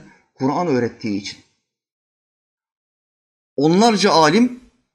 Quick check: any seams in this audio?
no; 0 cuts

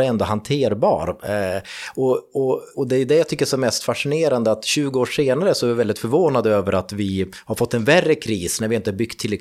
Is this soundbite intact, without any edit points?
no; 1 cut; at 2.7 s

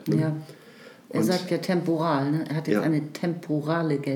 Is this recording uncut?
yes; 0 cuts

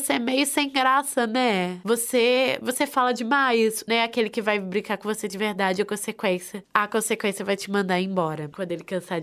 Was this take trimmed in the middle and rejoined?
yes; 1 cut; at 3.9 s

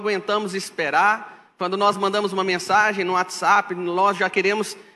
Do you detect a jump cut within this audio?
no; 0 cuts

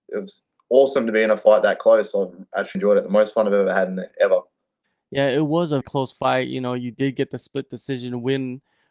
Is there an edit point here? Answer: yes; 2 cuts; at 2.7 s, 5.8 s

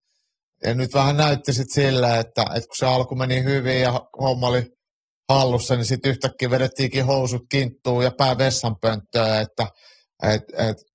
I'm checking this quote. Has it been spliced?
no; 0 cuts

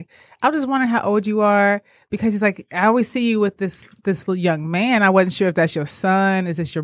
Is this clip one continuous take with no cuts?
yes; 0 cuts

